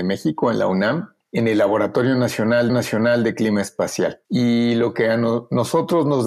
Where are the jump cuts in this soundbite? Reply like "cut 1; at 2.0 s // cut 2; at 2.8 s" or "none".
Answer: cut 1; at 2.7 s // cut 2; at 4.2 s